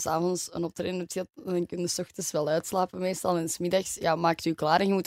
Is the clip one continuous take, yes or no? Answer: yes